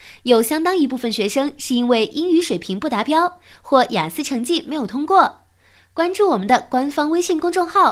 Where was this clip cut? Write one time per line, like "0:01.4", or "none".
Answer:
none

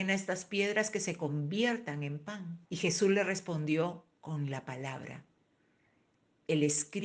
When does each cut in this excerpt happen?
0:02.6

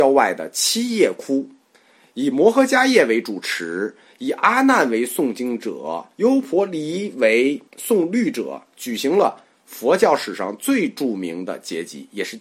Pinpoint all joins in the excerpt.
0:01.7
0:06.1
0:07.7

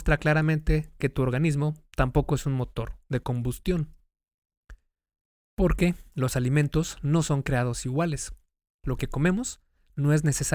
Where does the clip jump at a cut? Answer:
none

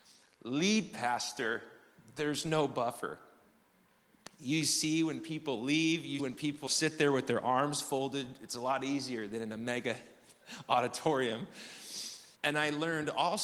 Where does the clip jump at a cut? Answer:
0:06.2
0:06.7
0:12.3

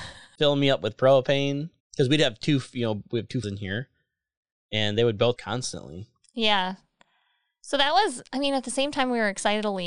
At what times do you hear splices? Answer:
0:01.8
0:03.4
0:05.4

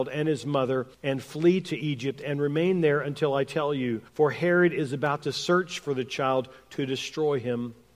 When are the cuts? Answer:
0:00.9
0:04.1

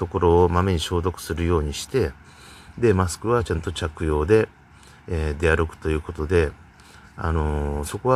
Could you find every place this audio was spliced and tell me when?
none

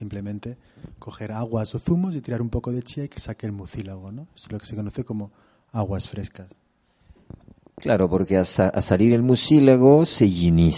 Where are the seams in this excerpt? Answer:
none

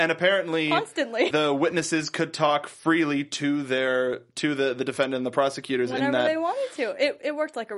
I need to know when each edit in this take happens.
0:01.3

